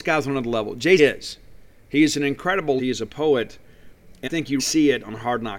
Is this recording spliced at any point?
yes; 4 cuts; at 1.0 s, 2.8 s, 4.3 s, 4.6 s

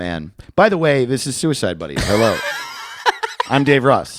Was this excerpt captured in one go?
yes; 0 cuts

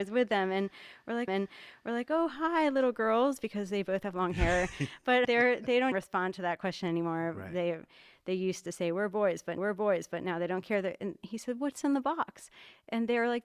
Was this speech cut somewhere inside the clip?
yes; 4 cuts; at 1.3 s, 5.2 s, 5.9 s, 9.6 s

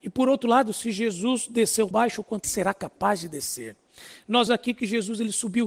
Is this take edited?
yes; 3 cuts; at 1.9 s, 2.4 s, 4.5 s

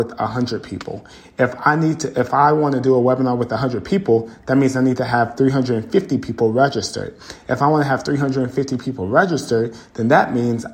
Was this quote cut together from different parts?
no; 0 cuts

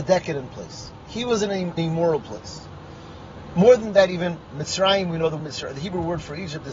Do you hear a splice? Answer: yes; 3 cuts; at 1.8 s, 3.8 s, 5.4 s

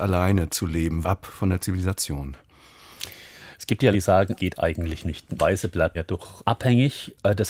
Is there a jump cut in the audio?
yes; 6 cuts; at 1.0 s, 3.9 s, 4.4 s, 5.4 s, 5.9 s, 6.4 s

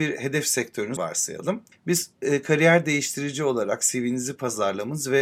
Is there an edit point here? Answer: yes; 2 cuts; at 1.0 s, 1.7 s

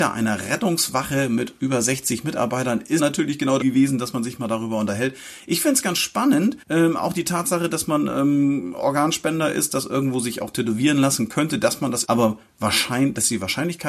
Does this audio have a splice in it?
yes; 4 cuts; at 3.0 s, 3.6 s, 6.6 s, 12.0 s

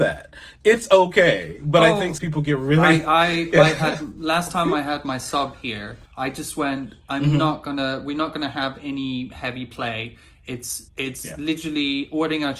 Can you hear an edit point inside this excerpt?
yes; 3 cuts; at 2.2 s, 6.1 s, 10.9 s

